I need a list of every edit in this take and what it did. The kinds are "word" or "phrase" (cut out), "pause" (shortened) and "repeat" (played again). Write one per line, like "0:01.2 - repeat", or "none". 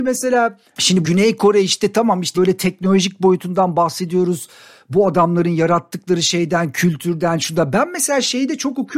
0:01.0 - word
0:02.3 - word